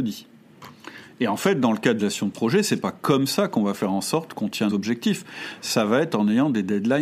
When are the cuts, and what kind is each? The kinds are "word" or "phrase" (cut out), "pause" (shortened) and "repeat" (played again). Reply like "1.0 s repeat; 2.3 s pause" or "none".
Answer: 2.0 s word; 4.7 s word